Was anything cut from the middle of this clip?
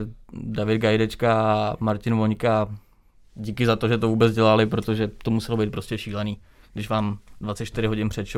no; 0 cuts

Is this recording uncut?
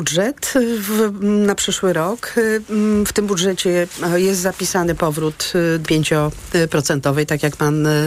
no; 1 cut; at 5.9 s

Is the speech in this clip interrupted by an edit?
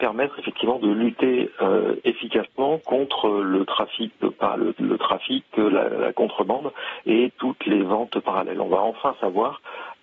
no; 0 cuts

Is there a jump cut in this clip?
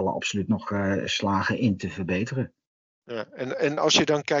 no; 0 cuts

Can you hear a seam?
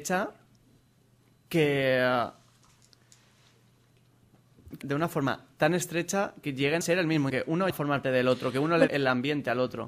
yes; 7 cuts; at 4.8 s, 6.4 s, 6.8 s, 7.3 s, 7.7 s, 8.0 s, 8.9 s

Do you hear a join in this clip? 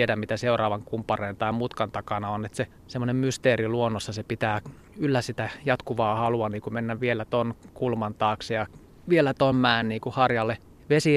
no; 0 cuts

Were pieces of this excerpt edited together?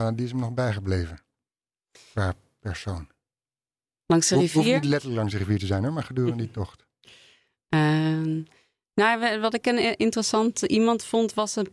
no; 0 cuts

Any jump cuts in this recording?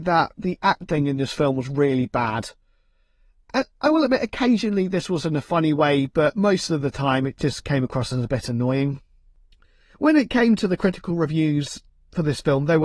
no; 0 cuts

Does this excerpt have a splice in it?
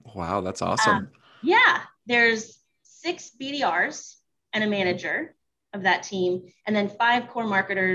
no; 0 cuts

